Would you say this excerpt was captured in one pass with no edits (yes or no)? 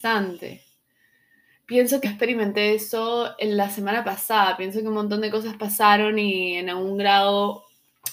no